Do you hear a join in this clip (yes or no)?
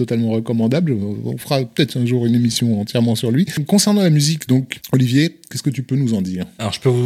no